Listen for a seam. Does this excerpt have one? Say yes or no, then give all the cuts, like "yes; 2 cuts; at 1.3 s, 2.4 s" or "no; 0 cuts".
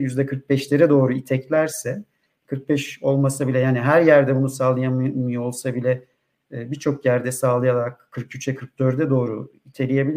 no; 0 cuts